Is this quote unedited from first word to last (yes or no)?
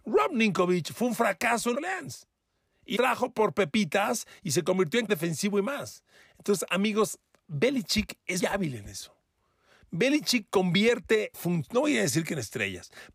no